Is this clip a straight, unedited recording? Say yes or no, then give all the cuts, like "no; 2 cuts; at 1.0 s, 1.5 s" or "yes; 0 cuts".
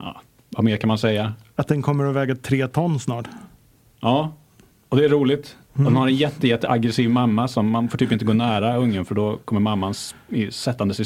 yes; 0 cuts